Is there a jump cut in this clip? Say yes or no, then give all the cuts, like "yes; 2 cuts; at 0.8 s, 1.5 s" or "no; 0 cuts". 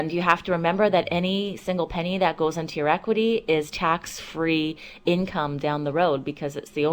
no; 0 cuts